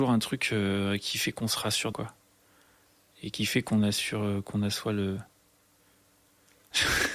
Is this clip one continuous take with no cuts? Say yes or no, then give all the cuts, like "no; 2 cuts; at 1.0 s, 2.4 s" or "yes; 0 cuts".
no; 1 cut; at 1.9 s